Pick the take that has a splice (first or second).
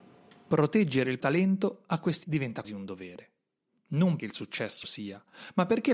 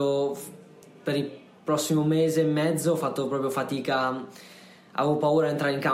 first